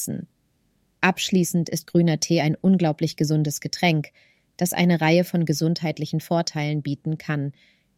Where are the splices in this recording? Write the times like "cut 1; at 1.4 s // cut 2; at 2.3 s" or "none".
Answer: none